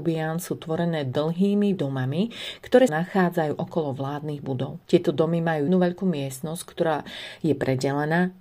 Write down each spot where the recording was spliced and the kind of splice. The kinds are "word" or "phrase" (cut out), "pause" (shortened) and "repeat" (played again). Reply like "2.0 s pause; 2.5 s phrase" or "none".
1.8 s phrase; 2.9 s word; 4.8 s pause; 5.7 s word